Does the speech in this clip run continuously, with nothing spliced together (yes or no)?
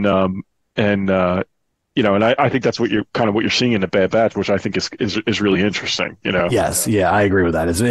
yes